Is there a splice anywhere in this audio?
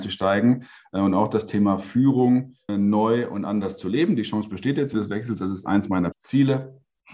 yes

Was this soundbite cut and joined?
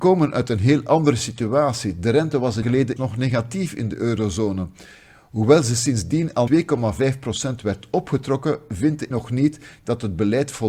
yes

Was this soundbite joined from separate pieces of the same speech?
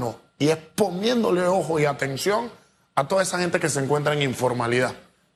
no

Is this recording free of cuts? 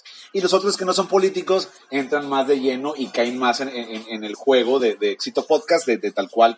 yes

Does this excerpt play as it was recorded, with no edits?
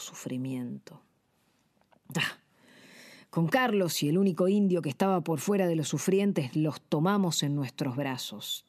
yes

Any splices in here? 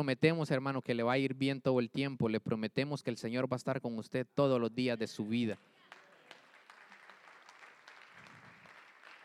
no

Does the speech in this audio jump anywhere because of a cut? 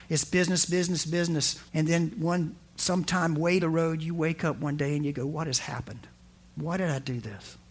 yes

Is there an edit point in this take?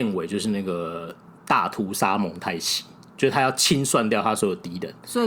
no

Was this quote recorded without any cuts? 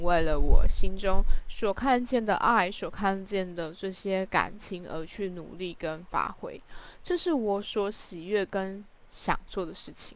yes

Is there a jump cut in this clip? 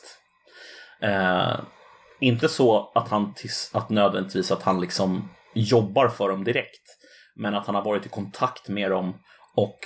no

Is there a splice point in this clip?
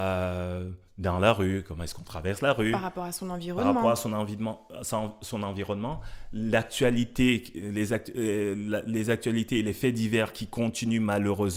no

